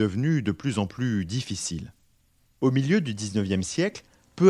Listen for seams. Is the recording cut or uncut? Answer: uncut